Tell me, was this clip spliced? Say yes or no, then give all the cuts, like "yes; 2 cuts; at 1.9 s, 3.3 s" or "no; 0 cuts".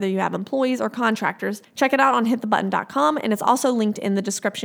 no; 0 cuts